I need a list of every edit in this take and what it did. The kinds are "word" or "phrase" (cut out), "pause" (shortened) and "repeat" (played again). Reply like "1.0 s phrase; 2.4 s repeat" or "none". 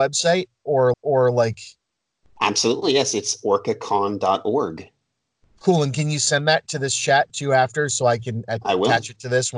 0.9 s repeat